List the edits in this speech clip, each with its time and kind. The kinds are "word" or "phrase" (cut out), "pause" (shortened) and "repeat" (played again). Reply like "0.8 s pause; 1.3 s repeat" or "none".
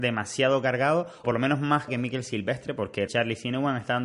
1.2 s word; 1.9 s word; 3.1 s word